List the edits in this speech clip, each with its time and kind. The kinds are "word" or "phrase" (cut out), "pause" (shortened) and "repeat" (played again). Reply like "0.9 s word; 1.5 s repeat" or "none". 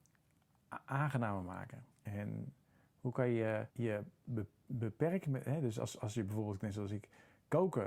1.9 s pause; 3.7 s pause